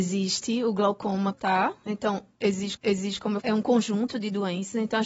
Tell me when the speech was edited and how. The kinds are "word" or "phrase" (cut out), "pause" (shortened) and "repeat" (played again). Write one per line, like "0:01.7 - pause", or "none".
0:01.3 - word
0:02.8 - repeat
0:03.4 - phrase